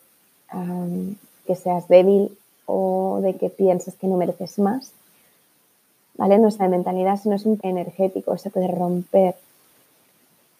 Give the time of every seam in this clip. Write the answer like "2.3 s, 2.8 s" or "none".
1.4 s, 6.6 s, 7.6 s

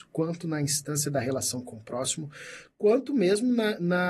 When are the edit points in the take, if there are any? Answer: none

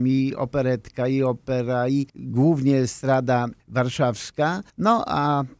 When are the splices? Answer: 2.1 s, 4.7 s

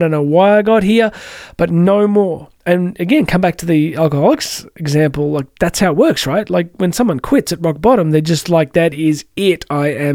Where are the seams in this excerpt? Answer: 2.6 s

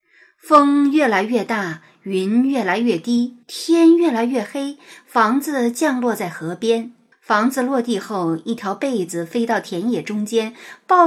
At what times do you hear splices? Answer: 3.4 s, 7.1 s

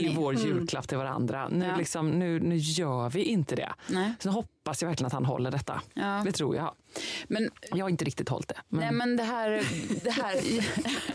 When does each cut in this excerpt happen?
none

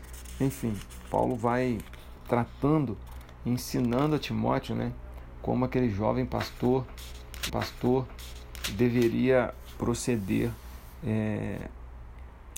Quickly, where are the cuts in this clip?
7.5 s

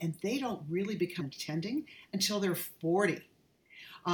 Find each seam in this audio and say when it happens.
1.2 s

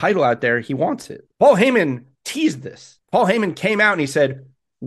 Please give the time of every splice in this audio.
1.3 s, 2.1 s, 3.0 s

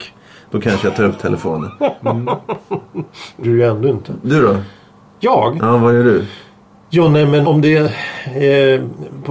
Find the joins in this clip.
3.4 s, 7.4 s

